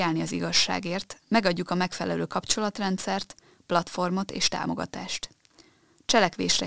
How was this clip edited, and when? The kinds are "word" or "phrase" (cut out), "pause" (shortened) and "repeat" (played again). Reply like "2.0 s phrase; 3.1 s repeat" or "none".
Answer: none